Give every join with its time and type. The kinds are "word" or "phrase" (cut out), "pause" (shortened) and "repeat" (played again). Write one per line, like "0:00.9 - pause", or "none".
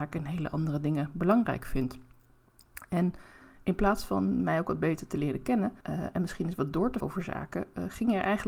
0:05.8 - pause
0:07.0 - word